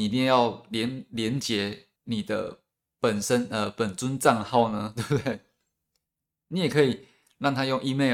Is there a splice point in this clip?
yes; 1 cut; at 2.0 s

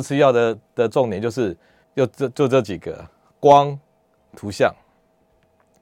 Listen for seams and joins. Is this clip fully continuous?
no; 2 cuts; at 1.8 s, 4.3 s

